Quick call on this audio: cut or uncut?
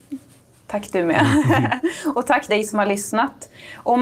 cut